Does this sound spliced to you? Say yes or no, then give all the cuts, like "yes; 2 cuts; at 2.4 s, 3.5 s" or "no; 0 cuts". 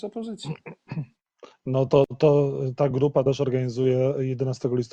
no; 0 cuts